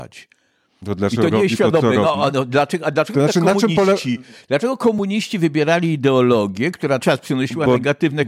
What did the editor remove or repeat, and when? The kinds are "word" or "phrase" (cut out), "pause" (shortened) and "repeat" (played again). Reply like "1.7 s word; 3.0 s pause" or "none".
7.0 s word